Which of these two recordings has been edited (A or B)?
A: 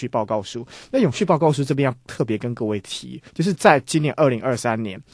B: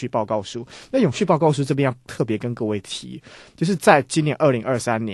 A